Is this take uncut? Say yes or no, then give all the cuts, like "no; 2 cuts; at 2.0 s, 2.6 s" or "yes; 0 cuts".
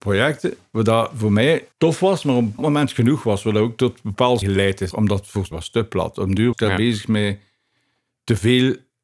no; 6 cuts; at 1.7 s, 2.6 s, 4.4 s, 4.9 s, 5.5 s, 6.5 s